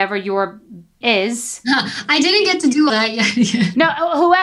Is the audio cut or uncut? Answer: cut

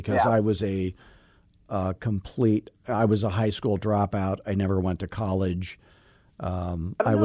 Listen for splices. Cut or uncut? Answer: uncut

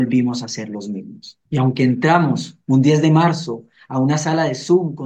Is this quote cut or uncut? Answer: cut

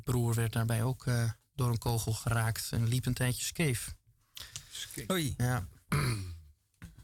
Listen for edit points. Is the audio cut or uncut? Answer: uncut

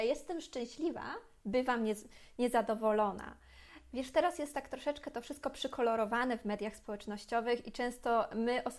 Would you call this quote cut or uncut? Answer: uncut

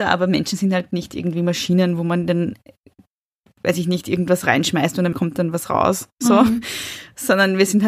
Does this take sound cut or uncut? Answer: cut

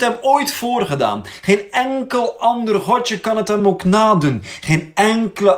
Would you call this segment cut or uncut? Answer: uncut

